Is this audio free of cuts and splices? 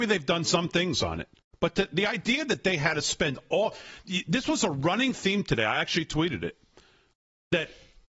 yes; 0 cuts

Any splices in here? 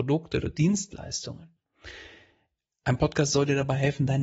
no; 0 cuts

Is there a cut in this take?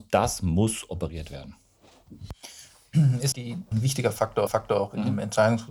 yes; 3 cuts; at 3.3 s, 3.7 s, 4.5 s

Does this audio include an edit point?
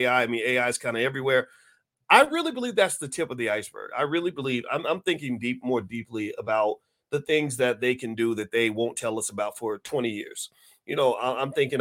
no; 0 cuts

